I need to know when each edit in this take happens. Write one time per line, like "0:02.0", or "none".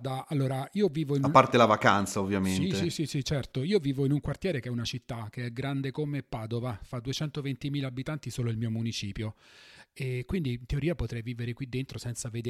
none